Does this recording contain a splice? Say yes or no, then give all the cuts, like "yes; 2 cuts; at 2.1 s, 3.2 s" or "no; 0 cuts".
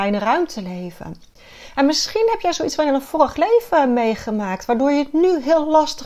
no; 0 cuts